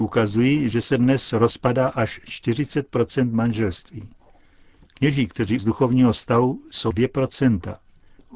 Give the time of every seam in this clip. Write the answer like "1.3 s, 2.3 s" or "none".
5.6 s, 6.9 s